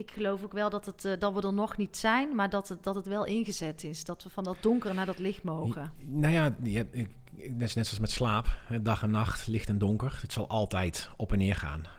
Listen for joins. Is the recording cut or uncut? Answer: uncut